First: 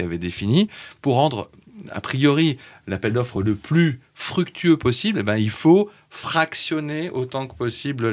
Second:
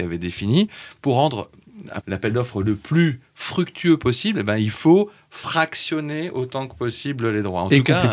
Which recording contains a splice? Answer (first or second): second